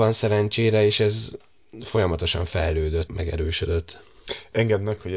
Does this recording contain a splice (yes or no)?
yes